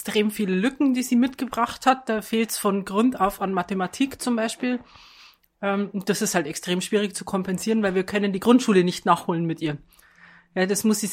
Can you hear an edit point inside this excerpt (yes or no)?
no